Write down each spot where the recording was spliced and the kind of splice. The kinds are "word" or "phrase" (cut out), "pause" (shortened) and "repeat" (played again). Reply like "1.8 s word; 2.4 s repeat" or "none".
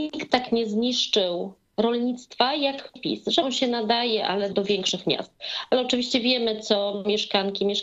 3.0 s word; 3.4 s word; 4.5 s word